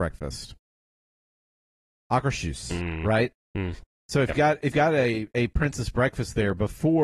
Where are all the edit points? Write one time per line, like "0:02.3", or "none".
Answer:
0:04.3
0:04.7

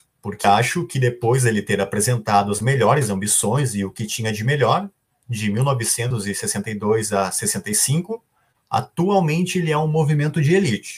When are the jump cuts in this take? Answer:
none

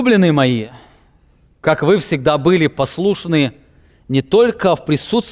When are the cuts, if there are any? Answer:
none

